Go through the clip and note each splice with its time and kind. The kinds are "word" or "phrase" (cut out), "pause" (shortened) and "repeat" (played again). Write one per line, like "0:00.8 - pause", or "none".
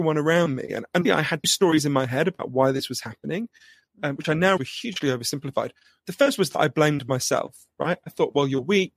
0:01.0 - word
0:01.4 - word
0:04.6 - word